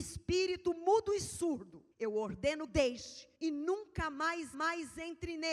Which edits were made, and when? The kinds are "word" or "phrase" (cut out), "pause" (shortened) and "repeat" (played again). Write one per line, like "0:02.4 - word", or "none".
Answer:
0:01.9 - pause
0:02.7 - phrase
0:03.3 - pause
0:04.5 - repeat